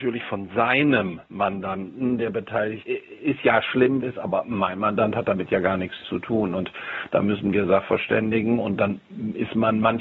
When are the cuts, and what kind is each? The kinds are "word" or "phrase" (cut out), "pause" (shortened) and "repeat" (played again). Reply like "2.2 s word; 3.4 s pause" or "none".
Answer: 2.8 s word; 4.0 s phrase